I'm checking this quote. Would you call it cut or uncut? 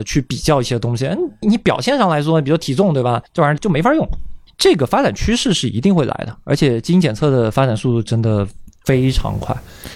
cut